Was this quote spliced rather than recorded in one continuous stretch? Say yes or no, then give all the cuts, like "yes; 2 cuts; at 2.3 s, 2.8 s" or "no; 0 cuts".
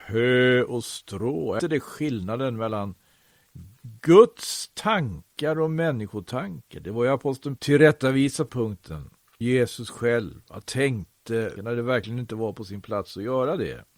yes; 7 cuts; at 1.6 s, 3.8 s, 7.6 s, 8.5 s, 9.4 s, 10.6 s, 11.6 s